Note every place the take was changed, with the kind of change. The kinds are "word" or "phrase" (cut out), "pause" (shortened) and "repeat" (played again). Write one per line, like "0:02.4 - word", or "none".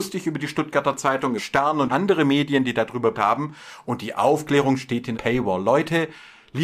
0:01.4 - word
0:01.9 - word
0:03.1 - word
0:05.1 - word